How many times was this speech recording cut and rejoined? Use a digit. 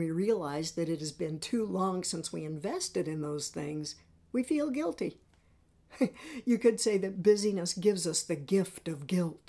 0